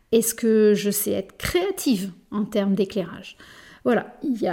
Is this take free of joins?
yes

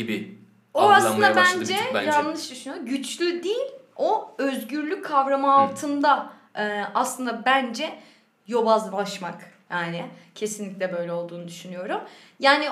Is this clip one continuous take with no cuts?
yes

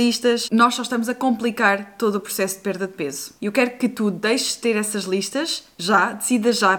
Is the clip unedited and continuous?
no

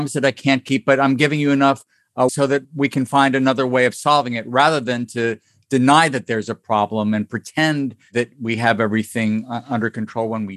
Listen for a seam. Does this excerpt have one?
yes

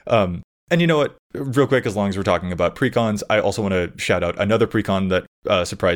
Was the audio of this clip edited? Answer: no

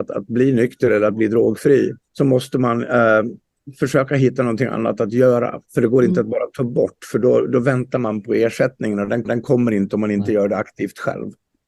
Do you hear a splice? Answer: yes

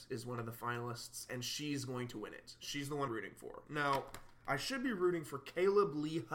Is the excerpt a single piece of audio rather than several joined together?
no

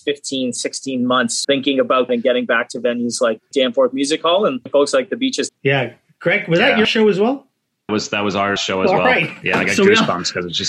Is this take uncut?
no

